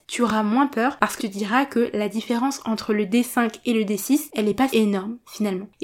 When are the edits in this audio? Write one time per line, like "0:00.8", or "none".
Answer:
0:01.2
0:04.7